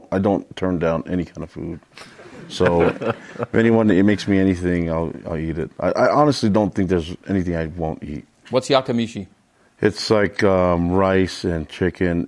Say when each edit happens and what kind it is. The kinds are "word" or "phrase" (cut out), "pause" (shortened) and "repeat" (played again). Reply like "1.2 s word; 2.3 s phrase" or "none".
none